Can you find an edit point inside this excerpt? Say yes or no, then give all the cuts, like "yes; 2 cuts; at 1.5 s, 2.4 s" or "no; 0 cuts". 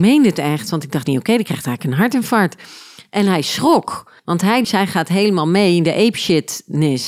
yes; 3 cuts; at 1.0 s, 4.2 s, 4.6 s